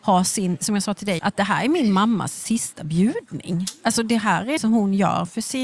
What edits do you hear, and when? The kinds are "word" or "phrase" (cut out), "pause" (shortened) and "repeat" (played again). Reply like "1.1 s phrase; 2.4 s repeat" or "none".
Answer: 1.2 s word; 4.6 s word